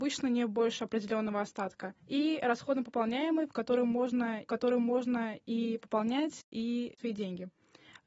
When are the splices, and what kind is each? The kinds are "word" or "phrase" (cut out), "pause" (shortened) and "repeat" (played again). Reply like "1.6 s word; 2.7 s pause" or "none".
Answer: 2.0 s pause; 4.5 s repeat; 7.0 s word